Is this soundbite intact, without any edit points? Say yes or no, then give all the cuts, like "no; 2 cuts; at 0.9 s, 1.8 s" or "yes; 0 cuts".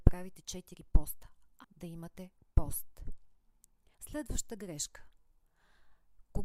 no; 2 cuts; at 1.6 s, 3.9 s